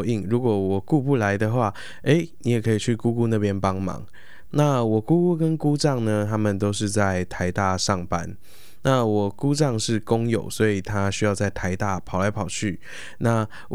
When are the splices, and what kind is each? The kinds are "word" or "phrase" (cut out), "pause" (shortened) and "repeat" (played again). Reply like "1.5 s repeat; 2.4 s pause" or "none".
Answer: none

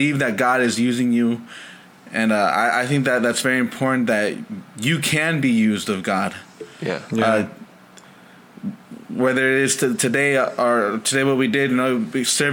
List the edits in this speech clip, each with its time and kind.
none

